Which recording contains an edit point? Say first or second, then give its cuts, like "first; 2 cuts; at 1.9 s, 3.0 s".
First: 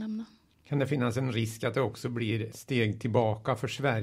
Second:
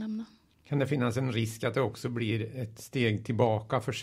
first; 1 cut; at 2.5 s